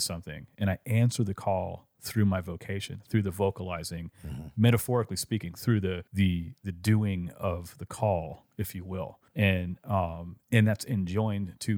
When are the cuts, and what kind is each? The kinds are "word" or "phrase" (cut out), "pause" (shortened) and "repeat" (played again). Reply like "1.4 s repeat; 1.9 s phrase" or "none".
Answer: 6.1 s pause; 9.3 s pause